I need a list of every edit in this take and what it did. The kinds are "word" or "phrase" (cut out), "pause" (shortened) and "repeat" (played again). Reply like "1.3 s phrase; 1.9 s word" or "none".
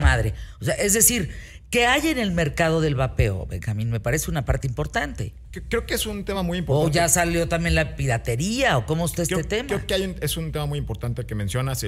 none